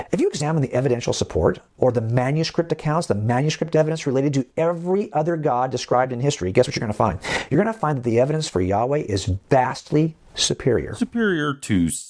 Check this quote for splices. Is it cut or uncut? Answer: uncut